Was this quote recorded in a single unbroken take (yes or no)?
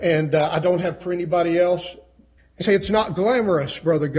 no